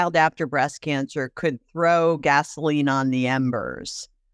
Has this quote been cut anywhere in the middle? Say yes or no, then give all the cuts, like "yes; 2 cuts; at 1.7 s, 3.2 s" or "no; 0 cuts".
no; 0 cuts